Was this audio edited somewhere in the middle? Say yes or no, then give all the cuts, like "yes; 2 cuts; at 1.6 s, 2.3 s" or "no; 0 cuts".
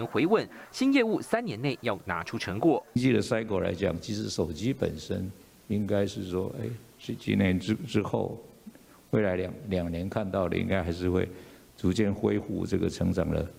no; 0 cuts